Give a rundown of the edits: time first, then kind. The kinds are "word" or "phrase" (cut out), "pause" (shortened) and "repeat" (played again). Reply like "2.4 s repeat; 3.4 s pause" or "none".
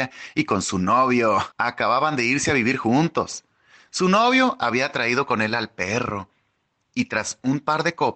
1.5 s pause